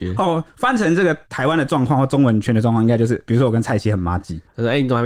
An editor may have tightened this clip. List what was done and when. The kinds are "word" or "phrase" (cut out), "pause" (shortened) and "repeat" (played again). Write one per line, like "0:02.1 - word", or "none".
0:01.2 - pause